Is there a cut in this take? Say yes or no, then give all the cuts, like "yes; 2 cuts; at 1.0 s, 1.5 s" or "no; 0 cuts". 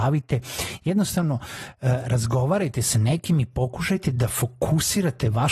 no; 0 cuts